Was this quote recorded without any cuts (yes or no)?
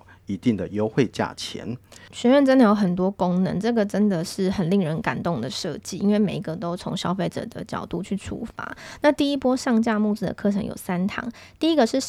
yes